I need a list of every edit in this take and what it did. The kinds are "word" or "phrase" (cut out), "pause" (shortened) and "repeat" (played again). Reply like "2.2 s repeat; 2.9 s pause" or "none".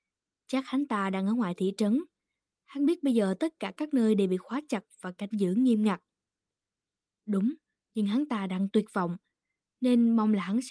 none